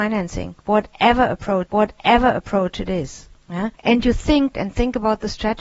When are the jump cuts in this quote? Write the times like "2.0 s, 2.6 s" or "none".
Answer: 1.7 s, 3.7 s, 4.5 s